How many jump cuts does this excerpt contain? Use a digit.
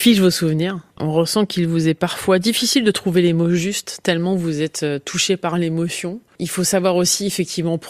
0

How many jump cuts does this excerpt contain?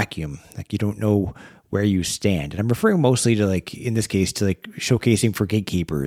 0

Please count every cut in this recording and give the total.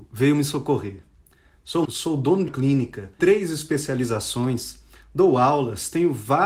3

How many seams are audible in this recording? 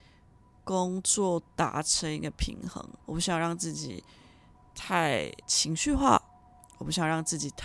2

